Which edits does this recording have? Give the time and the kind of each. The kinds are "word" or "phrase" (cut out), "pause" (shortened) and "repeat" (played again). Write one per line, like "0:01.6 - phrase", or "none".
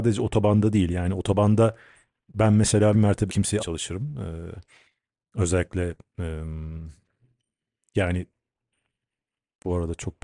0:02.9 - word
0:03.3 - word
0:03.6 - word